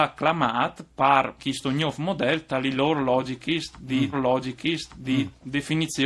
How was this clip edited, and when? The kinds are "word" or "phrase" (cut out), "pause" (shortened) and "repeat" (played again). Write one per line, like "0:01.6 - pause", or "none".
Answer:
0:01.4 - word
0:04.1 - repeat